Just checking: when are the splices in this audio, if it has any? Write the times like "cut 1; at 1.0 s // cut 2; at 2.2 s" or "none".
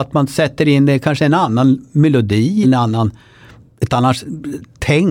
cut 1; at 2.6 s // cut 2; at 3.9 s

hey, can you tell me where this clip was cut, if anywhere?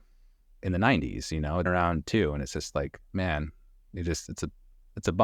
cut 1; at 1.7 s

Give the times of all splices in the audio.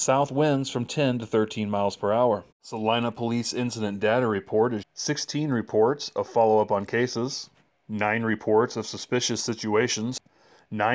cut 1; at 2.5 s // cut 2; at 4.8 s // cut 3; at 7.7 s

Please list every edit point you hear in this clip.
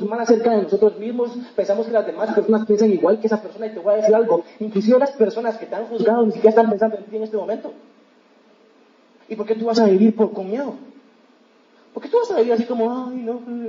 none

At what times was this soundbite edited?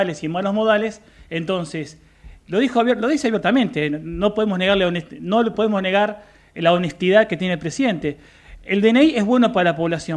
none

